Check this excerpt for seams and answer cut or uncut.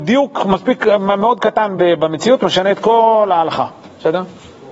uncut